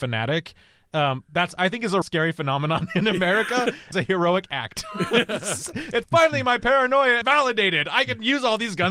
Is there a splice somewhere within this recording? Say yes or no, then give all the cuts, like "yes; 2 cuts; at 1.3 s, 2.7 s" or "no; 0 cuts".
yes; 4 cuts; at 2.0 s, 3.9 s, 6.0 s, 7.2 s